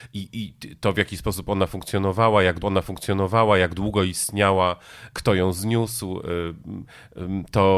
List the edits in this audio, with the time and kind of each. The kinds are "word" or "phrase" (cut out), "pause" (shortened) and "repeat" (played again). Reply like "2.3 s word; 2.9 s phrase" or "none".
2.6 s repeat; 5.1 s word